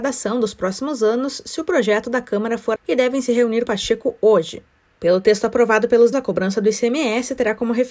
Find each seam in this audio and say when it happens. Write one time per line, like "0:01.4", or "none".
0:02.8
0:03.7
0:06.1